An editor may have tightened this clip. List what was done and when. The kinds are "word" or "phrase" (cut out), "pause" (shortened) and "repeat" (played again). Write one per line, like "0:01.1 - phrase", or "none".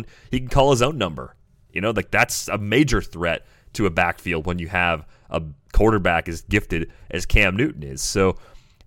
none